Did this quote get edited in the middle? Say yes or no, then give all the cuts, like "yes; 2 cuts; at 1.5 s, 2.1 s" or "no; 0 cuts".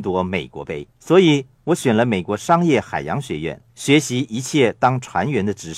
yes; 2 cuts; at 0.9 s, 3.7 s